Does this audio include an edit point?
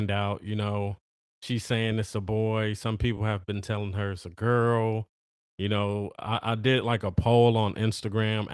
no; 0 cuts

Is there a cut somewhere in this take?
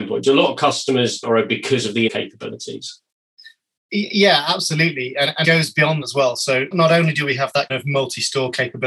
yes; 6 cuts; at 1.2 s, 2.1 s, 5.4 s, 6.0 s, 6.7 s, 7.7 s

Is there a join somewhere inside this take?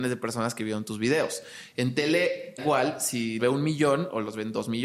yes; 2 cuts; at 2.6 s, 3.4 s

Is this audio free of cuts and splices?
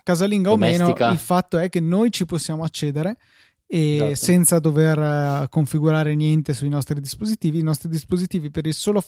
yes; 0 cuts

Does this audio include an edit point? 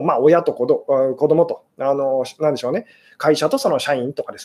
no; 0 cuts

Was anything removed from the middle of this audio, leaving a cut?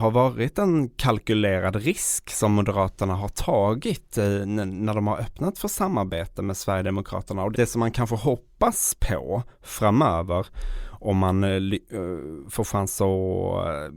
yes; 1 cut; at 7.5 s

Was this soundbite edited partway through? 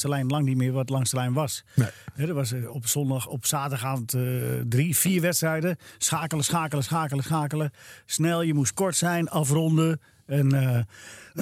no; 0 cuts

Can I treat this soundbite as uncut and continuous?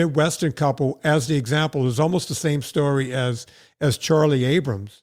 yes; 0 cuts

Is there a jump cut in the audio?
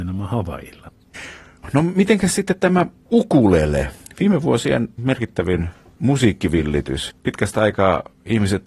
no; 0 cuts

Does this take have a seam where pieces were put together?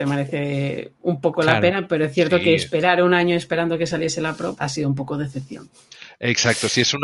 yes; 1 cut; at 4.6 s

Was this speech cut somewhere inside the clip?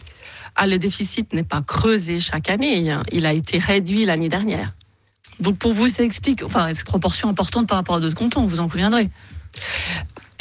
yes; 2 cuts; at 5.9 s, 6.8 s

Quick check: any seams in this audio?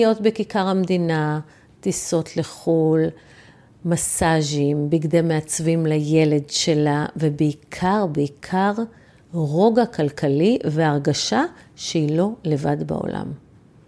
no; 0 cuts

